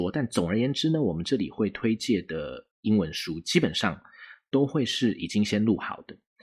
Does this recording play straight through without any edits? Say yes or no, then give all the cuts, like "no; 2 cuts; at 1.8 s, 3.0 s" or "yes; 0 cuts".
no; 1 cut; at 2.7 s